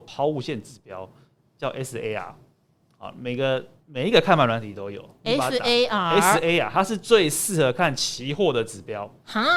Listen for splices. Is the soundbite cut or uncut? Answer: uncut